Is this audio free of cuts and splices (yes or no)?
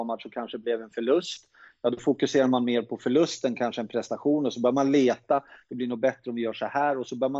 yes